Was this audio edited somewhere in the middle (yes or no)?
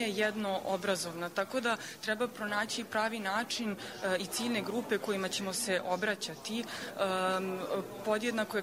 no